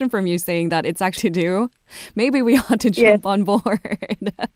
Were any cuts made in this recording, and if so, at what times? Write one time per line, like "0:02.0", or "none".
0:01.2